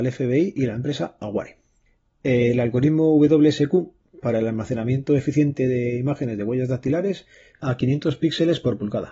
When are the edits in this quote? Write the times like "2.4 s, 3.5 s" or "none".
7.6 s